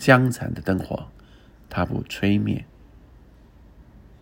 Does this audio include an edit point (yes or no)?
no